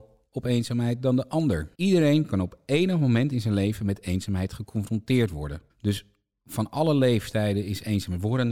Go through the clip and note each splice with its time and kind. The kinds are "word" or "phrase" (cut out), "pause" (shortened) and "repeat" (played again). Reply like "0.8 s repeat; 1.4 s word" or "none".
1.7 s pause; 5.7 s pause

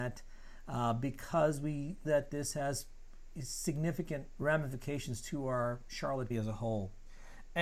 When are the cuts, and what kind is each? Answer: 2.0 s word; 4.4 s word; 6.3 s word

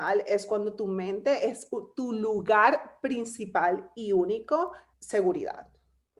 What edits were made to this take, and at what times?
4.9 s word

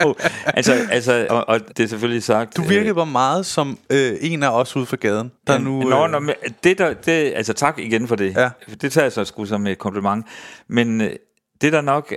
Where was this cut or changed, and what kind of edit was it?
1.3 s word; 1.7 s word; 5.4 s pause

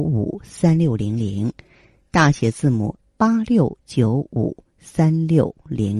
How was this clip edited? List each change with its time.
3.0 s word

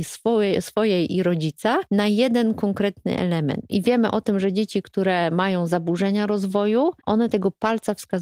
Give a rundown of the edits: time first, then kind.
7.0 s pause

